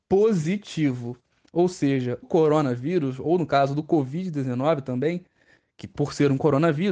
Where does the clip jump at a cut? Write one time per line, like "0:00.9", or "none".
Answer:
0:02.2